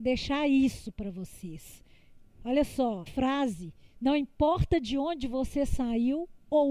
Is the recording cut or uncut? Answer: cut